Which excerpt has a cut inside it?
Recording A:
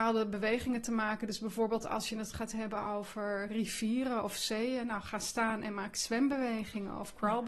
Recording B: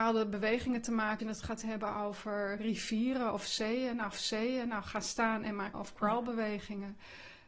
B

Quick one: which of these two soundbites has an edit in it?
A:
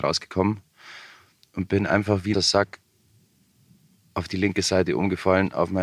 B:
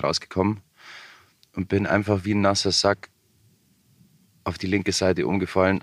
A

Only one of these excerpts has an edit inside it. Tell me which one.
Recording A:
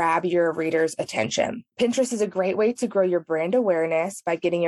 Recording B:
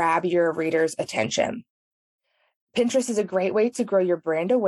A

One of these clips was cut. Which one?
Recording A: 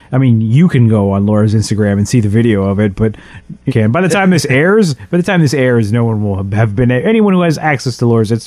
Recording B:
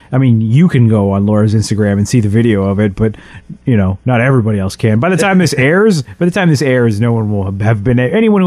A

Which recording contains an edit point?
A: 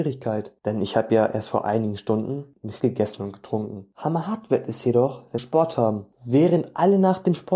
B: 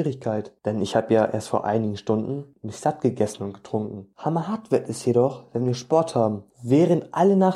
A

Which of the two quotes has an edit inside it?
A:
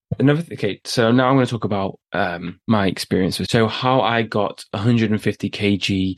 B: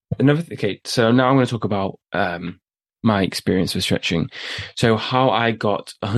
A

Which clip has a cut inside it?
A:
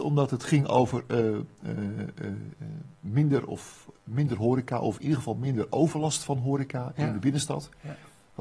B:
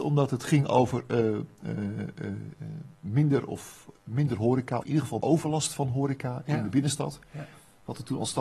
B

